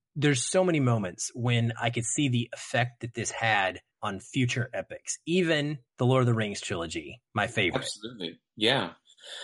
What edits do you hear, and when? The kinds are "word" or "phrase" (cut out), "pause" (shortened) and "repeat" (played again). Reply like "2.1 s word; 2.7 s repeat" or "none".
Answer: 3.9 s pause; 5.9 s pause; 7.3 s pause